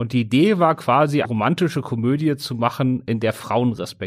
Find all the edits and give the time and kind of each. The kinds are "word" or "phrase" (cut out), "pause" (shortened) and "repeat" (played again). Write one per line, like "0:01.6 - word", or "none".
0:01.2 - word